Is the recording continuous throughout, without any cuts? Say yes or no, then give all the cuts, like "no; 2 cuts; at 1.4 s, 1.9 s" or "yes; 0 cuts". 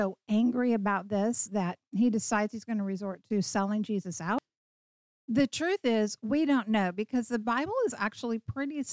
yes; 0 cuts